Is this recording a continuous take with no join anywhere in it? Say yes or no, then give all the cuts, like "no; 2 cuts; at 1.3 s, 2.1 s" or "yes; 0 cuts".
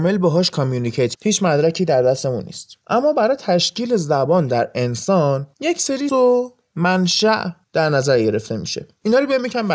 no; 2 cuts; at 1.1 s, 6.1 s